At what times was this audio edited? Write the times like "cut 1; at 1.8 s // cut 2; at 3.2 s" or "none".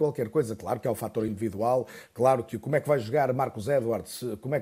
none